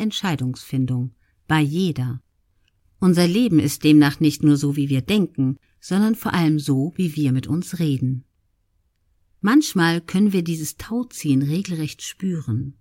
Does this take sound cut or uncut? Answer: uncut